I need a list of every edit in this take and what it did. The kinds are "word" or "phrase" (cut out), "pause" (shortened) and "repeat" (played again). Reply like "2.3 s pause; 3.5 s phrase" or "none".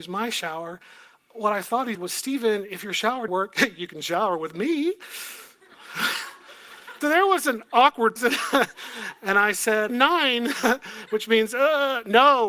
1.9 s word; 3.3 s word; 7.0 s word; 8.2 s word; 9.9 s word